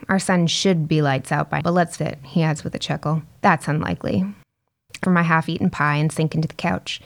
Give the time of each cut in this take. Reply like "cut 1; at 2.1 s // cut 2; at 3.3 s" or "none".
cut 1; at 1.6 s // cut 2; at 2.0 s // cut 3; at 3.3 s // cut 4; at 5.0 s